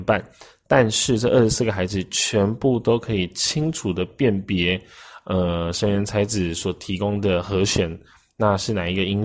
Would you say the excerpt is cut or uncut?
uncut